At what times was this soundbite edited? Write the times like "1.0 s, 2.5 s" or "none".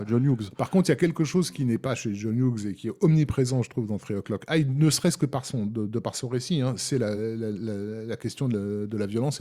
none